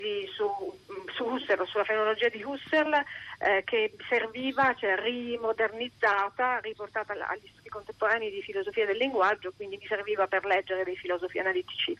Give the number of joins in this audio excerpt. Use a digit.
0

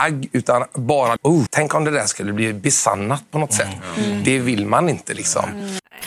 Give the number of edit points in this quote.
2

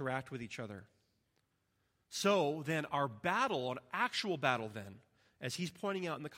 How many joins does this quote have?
0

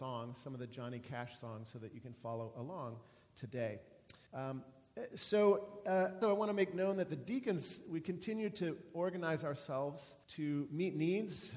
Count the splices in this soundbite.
3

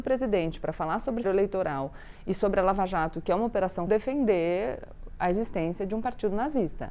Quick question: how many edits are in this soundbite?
2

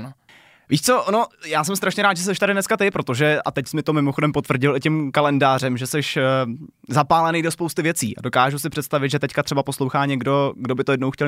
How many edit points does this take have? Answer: 0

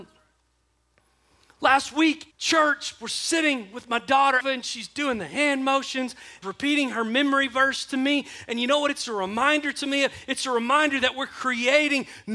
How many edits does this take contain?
3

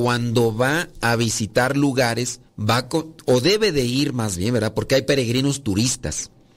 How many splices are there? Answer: 1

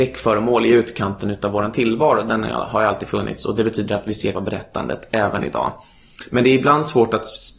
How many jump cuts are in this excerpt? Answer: 1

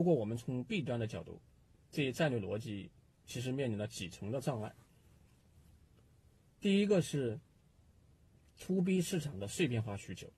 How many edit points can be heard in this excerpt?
0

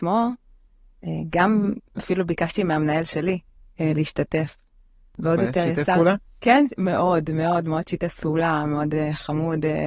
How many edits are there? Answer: 0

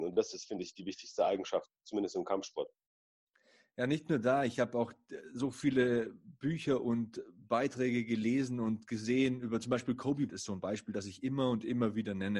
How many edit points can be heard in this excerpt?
1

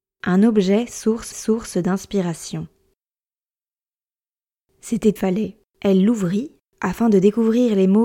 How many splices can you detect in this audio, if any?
3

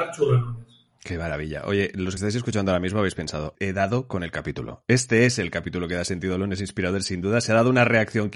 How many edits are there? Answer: 2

